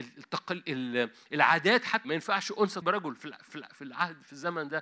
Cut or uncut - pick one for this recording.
cut